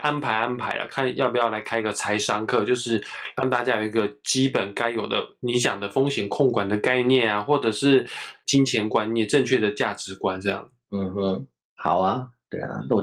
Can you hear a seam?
no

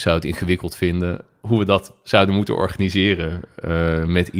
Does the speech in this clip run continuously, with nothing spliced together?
yes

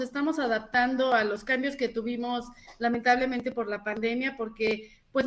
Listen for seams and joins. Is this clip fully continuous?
yes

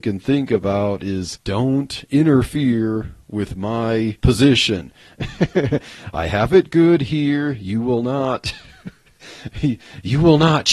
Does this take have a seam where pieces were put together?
yes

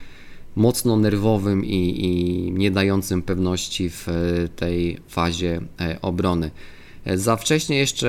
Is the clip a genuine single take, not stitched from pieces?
yes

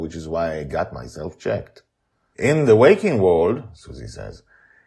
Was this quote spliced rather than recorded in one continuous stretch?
no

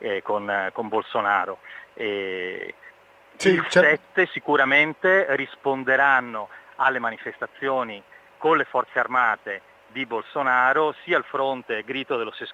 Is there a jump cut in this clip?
no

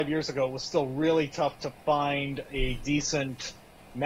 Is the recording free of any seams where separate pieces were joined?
yes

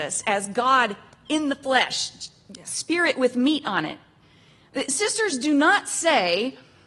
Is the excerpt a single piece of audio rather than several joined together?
no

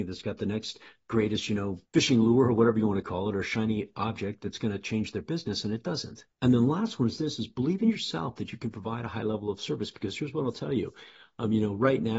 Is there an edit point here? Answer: yes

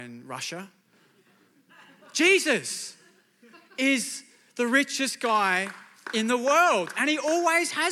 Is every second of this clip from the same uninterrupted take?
yes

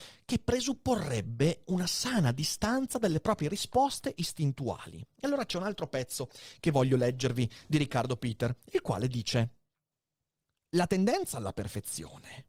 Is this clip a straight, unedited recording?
yes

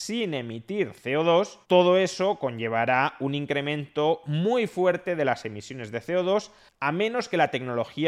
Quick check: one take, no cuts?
no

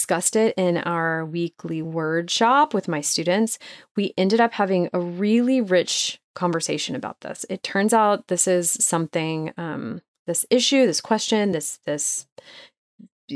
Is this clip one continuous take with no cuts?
yes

